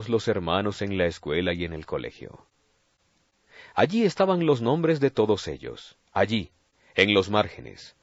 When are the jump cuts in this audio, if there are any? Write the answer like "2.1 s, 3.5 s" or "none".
6.1 s